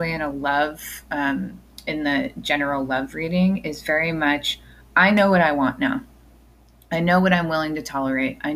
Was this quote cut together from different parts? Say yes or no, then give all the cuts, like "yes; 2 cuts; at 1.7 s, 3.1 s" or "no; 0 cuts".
no; 0 cuts